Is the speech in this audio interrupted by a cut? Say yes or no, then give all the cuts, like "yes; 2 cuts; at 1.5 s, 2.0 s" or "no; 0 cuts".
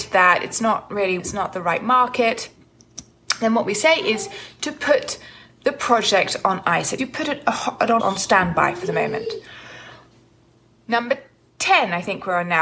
yes; 3 cuts; at 1.2 s, 7.0 s, 8.0 s